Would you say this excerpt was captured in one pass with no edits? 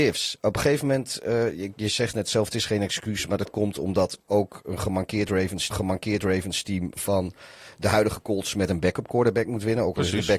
no; 1 cut; at 5.7 s

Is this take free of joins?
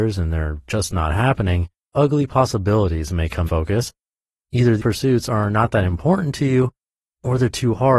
no; 3 cuts; at 1.9 s, 3.4 s, 4.8 s

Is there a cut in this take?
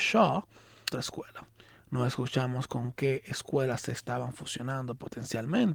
yes; 1 cut; at 0.9 s

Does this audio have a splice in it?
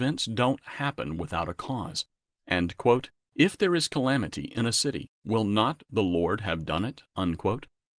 no; 0 cuts

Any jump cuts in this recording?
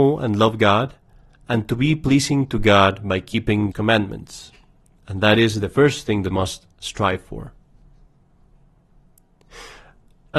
yes; 2 cuts; at 3.7 s, 6.3 s

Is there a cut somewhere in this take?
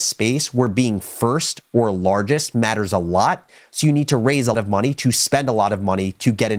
yes; 1 cut; at 4.5 s

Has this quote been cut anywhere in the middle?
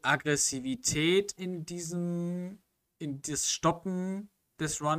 yes; 1 cut; at 1.4 s

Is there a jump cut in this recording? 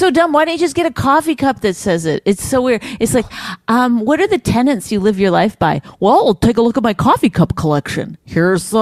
no; 0 cuts

